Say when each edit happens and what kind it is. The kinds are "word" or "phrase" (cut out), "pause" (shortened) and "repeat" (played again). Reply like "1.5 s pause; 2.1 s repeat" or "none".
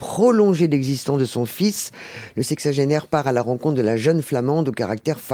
none